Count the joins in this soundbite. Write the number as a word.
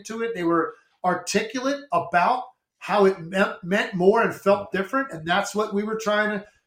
zero